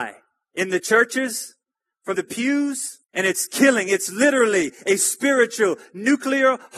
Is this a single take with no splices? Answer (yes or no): no